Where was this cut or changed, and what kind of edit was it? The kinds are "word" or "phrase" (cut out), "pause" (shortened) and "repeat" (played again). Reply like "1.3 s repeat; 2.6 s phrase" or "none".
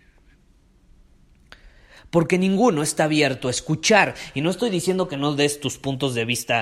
none